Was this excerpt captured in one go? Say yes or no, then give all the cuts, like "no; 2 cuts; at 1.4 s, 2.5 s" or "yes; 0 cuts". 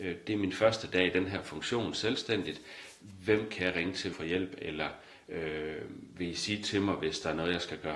no; 1 cut; at 4.1 s